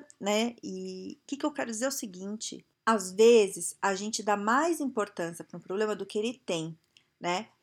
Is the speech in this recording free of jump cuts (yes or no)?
no